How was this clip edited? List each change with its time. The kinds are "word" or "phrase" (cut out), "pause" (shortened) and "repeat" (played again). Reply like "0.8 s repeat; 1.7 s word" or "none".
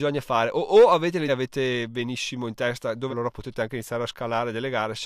1.3 s phrase; 3.1 s word